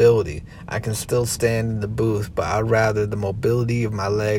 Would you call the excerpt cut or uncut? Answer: uncut